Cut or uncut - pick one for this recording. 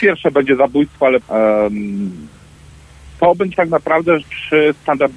cut